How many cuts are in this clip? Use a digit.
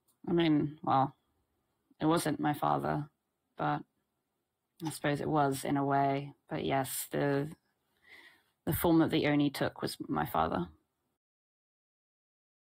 0